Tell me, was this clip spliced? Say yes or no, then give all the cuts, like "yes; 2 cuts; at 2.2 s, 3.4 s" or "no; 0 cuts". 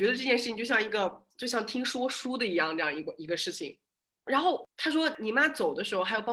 yes; 1 cut; at 1.3 s